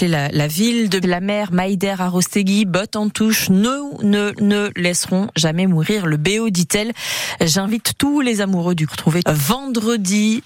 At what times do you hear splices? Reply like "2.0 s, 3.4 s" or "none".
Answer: 1.0 s, 4.4 s, 8.9 s, 9.2 s